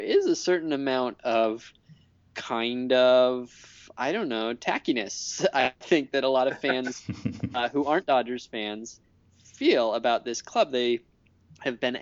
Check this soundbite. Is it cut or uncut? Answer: uncut